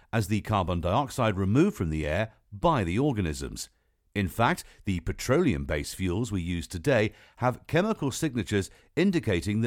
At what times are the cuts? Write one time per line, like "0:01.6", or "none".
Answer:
none

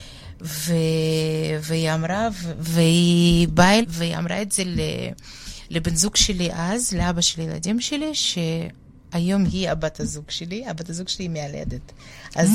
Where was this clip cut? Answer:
0:03.8

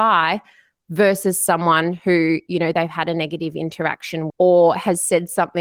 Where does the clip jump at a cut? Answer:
0:04.3

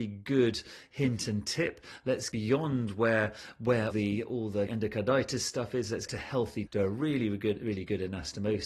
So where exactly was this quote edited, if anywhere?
0:02.3
0:03.9
0:04.7
0:06.1
0:06.7

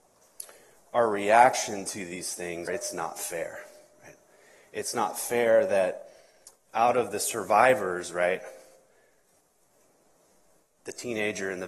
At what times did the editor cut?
0:02.7

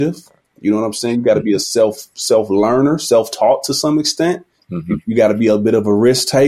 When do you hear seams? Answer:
0:04.6

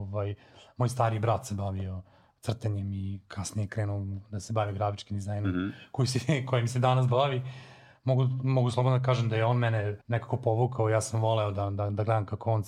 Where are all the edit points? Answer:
0:10.0

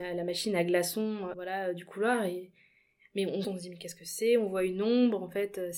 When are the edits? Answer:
0:01.3
0:03.4

